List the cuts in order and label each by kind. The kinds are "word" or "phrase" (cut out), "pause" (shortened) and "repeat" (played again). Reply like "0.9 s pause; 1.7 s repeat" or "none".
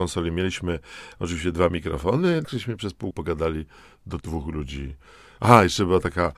2.4 s word; 3.1 s word; 4.2 s word